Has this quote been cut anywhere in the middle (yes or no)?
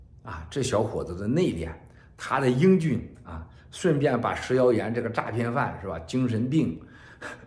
no